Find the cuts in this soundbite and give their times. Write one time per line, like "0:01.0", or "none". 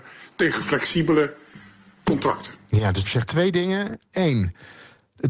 0:03.0

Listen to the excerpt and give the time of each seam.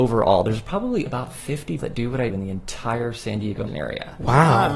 0:01.1
0:01.8
0:02.3
0:03.7

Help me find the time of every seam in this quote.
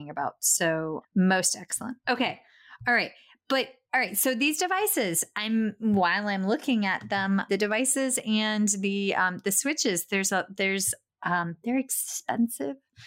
0:01.0
0:07.5
0:10.1

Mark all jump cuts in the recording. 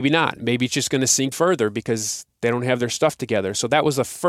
0:01.3

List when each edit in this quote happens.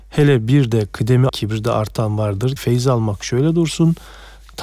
0:01.3
0:02.6

